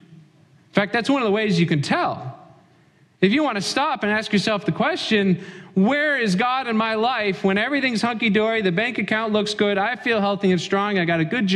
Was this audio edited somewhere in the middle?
no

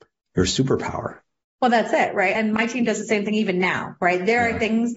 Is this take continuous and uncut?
yes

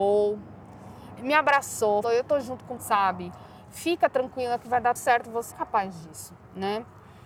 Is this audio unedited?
no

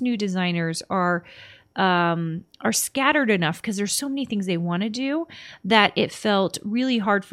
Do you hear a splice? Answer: no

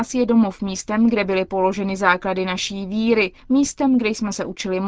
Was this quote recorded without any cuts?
no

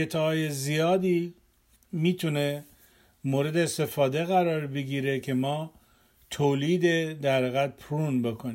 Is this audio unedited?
yes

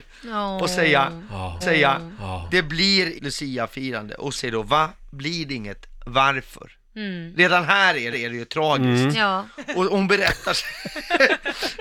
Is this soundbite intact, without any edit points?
no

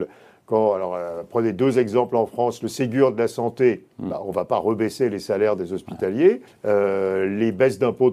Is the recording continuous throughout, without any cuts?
no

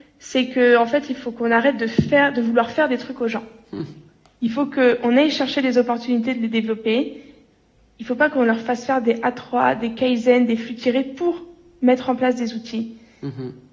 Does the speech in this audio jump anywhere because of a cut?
no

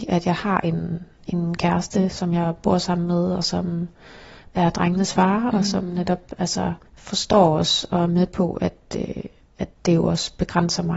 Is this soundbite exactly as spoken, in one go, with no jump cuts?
no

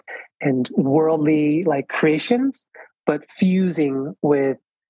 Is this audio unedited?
yes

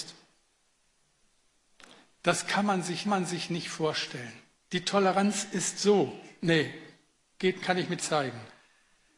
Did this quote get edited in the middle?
yes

